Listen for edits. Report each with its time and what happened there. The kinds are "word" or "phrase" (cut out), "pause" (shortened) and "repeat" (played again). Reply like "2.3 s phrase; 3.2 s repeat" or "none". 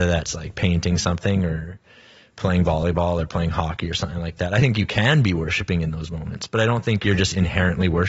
none